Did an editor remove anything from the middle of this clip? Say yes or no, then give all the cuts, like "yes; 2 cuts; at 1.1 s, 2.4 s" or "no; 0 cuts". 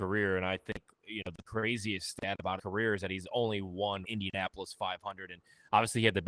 yes; 2 cuts; at 2.6 s, 4.0 s